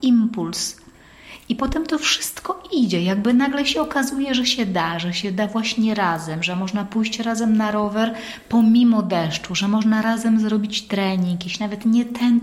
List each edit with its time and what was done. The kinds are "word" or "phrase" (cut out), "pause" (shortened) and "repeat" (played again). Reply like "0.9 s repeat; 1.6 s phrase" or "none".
none

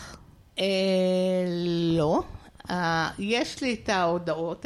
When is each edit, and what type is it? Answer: none

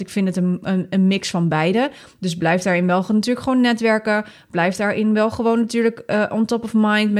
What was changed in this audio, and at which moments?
none

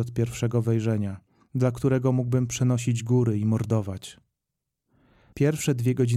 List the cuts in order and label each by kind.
none

